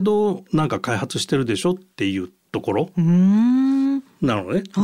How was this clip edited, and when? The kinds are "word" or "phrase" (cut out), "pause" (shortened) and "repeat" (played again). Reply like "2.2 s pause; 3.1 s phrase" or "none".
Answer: none